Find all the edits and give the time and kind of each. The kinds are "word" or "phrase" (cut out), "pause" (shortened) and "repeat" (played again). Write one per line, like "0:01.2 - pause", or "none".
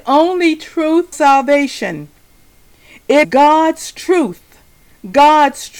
0:01.1 - word
0:03.2 - word